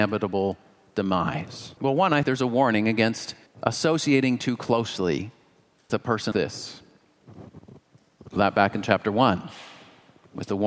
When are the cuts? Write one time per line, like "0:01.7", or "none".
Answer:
0:01.8
0:02.2
0:03.5
0:05.9
0:06.3
0:08.4